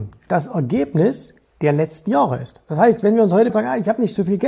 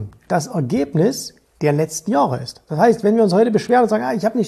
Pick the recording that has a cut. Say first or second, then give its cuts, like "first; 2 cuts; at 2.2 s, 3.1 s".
first; 1 cut; at 3.5 s